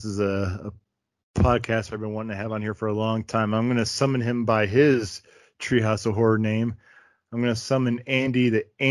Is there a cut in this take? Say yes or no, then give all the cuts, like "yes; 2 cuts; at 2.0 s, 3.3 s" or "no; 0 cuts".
no; 0 cuts